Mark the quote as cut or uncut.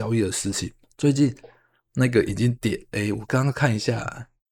uncut